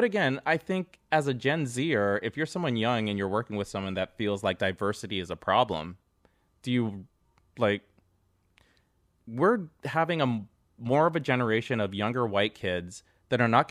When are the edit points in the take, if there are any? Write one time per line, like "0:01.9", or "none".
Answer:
none